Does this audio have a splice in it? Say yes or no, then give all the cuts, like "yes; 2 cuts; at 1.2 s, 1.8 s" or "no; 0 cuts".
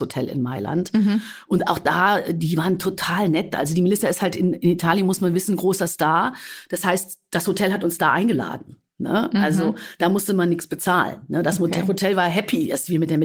no; 0 cuts